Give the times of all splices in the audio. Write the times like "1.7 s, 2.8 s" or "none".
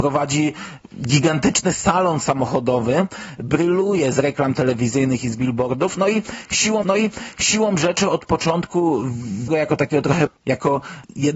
6.8 s, 9.5 s, 10.3 s